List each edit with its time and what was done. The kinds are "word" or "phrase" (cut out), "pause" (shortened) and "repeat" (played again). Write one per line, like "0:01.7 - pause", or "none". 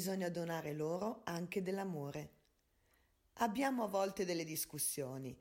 none